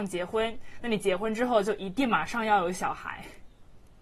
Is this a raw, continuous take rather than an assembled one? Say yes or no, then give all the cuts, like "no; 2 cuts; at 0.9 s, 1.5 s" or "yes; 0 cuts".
yes; 0 cuts